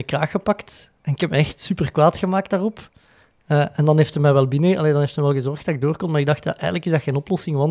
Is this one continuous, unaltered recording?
yes; 0 cuts

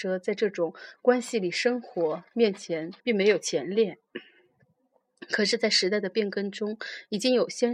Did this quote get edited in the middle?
yes; 1 cut; at 3.0 s

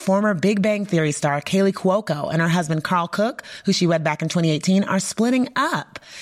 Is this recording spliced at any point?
no; 0 cuts

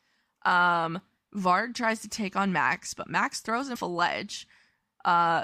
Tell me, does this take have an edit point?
yes; 1 cut; at 3.8 s

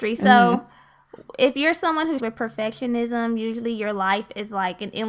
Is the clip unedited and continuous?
no; 1 cut; at 2.2 s

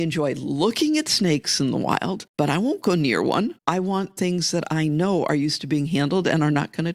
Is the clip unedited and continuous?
no; 2 cuts; at 2.3 s, 3.6 s

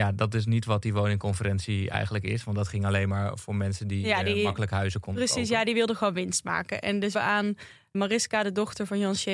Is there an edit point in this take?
yes; 2 cuts; at 7.1 s, 7.9 s

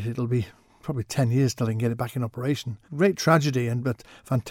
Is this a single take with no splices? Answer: no; 1 cut; at 2.8 s

